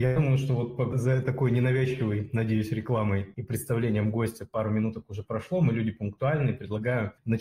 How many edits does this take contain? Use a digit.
1